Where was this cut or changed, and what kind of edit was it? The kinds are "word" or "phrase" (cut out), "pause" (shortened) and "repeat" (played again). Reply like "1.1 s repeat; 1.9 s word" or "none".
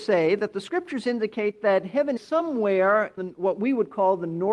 2.2 s word; 3.2 s word